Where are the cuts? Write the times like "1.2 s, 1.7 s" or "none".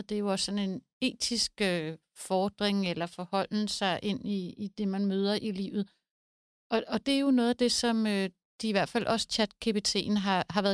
none